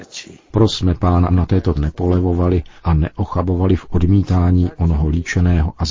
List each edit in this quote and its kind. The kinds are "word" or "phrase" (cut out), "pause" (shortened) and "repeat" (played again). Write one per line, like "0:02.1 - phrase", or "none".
0:01.3 - word
0:01.7 - word
0:02.8 - pause